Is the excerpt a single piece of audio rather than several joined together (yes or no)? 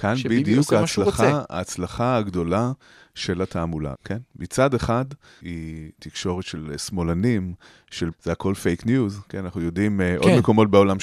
no